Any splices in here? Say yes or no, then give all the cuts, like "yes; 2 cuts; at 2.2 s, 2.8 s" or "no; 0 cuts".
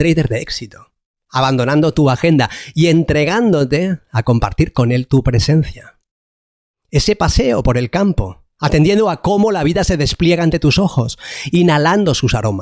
no; 0 cuts